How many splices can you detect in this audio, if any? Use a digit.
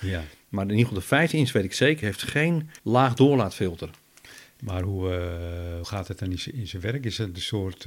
3